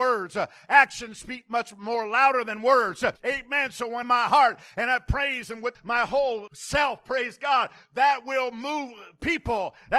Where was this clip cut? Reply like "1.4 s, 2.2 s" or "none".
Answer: 3.2 s, 4.0 s, 5.7 s, 6.5 s